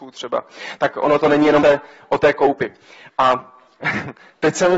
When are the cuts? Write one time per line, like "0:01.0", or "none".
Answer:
0:01.6